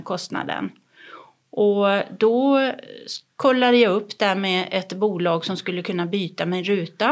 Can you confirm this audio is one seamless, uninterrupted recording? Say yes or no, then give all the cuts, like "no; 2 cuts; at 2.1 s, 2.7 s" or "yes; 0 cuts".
yes; 0 cuts